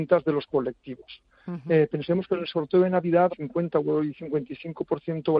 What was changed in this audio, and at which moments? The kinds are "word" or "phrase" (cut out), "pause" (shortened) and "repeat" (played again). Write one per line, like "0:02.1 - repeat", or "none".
0:03.3 - phrase